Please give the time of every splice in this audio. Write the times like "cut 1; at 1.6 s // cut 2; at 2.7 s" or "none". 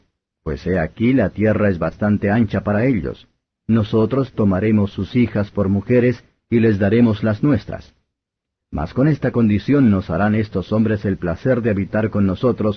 none